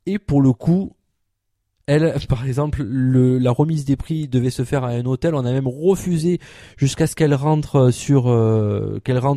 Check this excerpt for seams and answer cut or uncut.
uncut